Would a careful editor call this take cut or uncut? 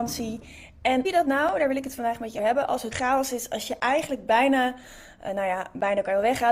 cut